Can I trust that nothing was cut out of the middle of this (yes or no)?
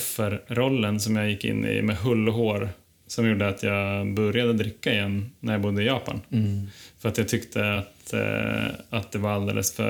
yes